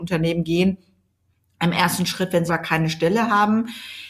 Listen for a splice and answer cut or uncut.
cut